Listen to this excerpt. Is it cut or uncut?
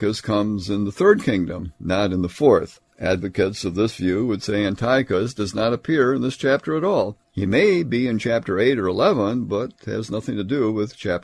cut